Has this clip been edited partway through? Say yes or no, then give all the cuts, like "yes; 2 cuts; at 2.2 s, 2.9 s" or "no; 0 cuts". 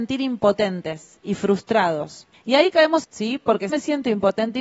yes; 3 cuts; at 2.3 s, 3.0 s, 3.7 s